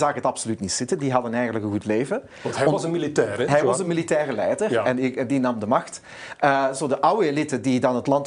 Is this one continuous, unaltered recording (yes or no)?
yes